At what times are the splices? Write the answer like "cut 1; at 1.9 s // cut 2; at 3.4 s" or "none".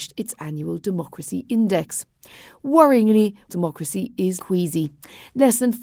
cut 1; at 3.5 s // cut 2; at 4.4 s